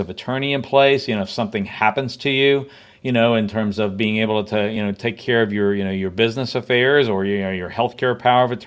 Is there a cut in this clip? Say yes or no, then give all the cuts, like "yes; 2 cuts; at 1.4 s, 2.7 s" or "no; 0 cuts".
no; 0 cuts